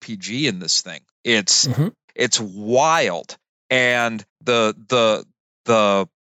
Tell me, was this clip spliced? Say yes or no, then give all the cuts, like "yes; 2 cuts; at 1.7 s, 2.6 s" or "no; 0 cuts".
yes; 3 cuts; at 1.1 s, 2.0 s, 4.3 s